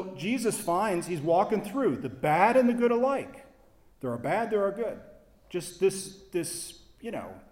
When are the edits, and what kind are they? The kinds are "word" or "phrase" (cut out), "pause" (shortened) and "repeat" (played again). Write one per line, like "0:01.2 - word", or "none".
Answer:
none